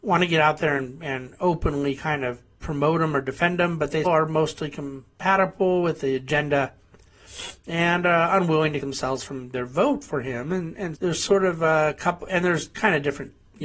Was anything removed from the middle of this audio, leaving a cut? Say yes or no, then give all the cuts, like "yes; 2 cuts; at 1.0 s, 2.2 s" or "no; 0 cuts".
yes; 3 cuts; at 4.0 s, 8.8 s, 10.9 s